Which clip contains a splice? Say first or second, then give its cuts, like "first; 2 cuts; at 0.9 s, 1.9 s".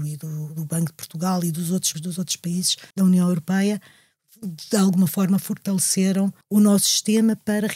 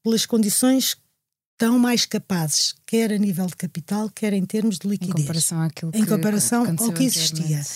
first; 3 cuts; at 1.9 s, 2.9 s, 6.4 s